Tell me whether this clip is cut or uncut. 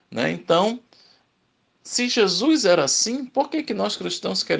uncut